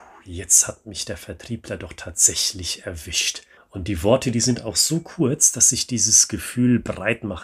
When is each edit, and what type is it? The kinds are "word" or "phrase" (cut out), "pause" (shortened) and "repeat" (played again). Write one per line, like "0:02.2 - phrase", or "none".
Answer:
0:03.6 - pause